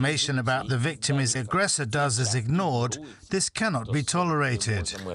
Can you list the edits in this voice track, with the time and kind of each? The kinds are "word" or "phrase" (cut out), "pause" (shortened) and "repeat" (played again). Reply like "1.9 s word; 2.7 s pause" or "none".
1.3 s phrase